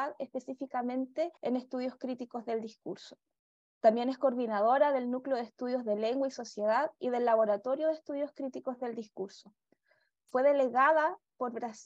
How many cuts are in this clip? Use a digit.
1